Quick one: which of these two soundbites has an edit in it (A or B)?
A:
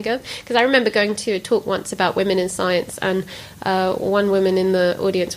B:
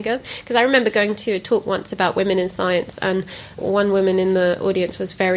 B